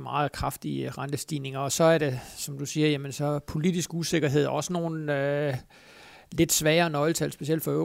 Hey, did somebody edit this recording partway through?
no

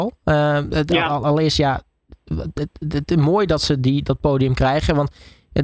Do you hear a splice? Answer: no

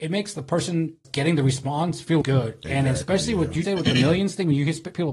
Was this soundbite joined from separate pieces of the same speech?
yes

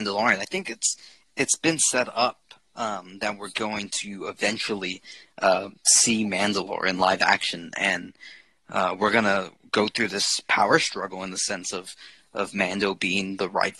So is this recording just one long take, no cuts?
yes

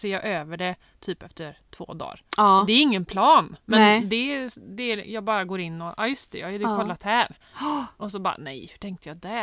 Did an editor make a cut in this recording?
no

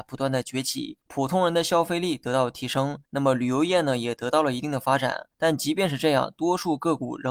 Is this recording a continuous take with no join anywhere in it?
no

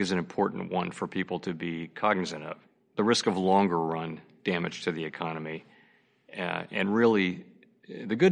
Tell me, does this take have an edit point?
no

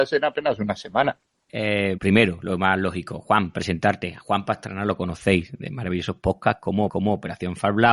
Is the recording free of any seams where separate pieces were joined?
no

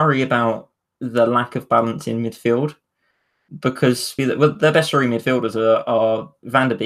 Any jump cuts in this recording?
yes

